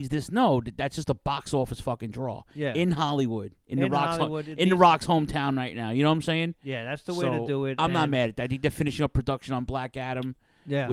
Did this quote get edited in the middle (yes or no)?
no